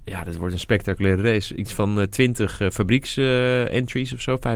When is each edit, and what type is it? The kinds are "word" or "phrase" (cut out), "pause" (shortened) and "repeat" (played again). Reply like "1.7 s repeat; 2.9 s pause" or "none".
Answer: none